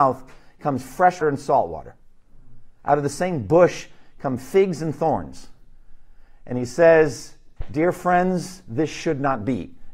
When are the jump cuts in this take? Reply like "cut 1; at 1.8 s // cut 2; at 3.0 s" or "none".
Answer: cut 1; at 1.2 s